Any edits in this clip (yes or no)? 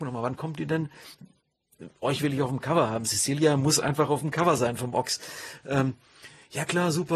no